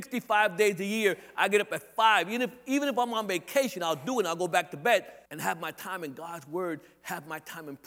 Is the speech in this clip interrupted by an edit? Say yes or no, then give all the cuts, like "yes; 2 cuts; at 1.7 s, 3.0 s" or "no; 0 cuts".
yes; 1 cut; at 5.3 s